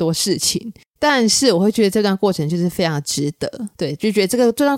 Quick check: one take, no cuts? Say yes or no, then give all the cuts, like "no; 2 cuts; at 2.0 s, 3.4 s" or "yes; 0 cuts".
no; 1 cut; at 3.7 s